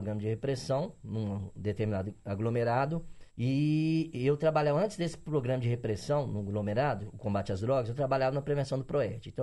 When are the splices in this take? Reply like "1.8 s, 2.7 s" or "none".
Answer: 3.3 s